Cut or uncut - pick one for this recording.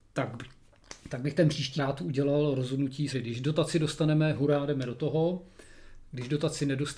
cut